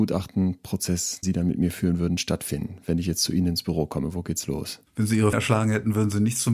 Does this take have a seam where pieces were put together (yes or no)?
yes